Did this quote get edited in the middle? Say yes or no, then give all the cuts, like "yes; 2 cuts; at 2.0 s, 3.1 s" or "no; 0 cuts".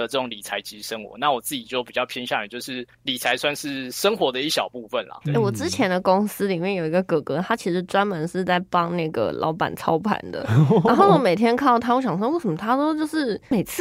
yes; 2 cuts; at 2.9 s, 5.2 s